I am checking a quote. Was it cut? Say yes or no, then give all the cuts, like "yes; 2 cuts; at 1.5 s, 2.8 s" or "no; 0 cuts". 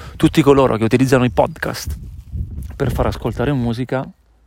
no; 0 cuts